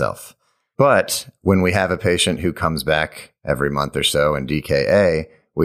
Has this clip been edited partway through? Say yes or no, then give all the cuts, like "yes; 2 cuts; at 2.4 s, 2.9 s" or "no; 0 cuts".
no; 0 cuts